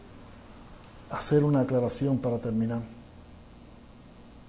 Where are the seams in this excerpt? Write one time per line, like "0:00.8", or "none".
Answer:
none